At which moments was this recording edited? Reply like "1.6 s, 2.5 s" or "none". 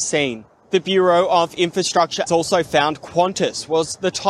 2.3 s